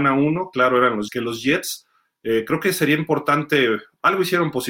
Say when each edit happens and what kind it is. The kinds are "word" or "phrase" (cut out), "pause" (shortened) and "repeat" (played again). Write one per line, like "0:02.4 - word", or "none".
0:01.1 - word